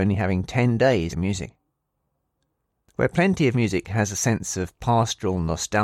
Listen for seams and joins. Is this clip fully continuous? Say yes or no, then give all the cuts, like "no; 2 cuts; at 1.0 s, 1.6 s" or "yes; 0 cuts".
no; 3 cuts; at 1.1 s, 2.0 s, 3.5 s